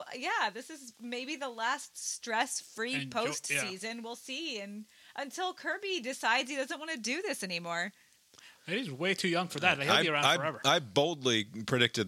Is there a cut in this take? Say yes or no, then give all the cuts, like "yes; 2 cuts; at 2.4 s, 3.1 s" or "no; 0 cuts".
no; 0 cuts